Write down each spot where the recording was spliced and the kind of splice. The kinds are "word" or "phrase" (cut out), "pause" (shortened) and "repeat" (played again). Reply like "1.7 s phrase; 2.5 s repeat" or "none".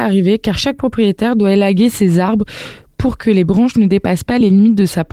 none